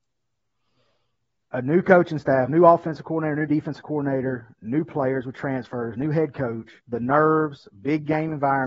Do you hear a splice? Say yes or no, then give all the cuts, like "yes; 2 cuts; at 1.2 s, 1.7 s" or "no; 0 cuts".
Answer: yes; 1 cut; at 6.8 s